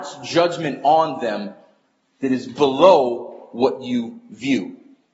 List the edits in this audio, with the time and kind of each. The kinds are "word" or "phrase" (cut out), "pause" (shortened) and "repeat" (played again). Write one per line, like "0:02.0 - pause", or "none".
none